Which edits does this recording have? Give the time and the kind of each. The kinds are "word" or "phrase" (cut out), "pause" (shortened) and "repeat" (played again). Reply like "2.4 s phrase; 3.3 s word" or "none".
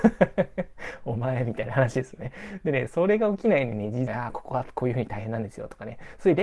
4.1 s phrase